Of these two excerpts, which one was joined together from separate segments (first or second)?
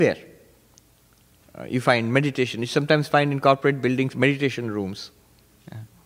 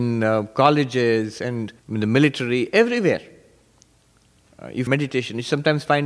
second